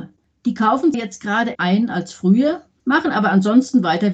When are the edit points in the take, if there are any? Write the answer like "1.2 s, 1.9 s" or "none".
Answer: 0.9 s, 1.5 s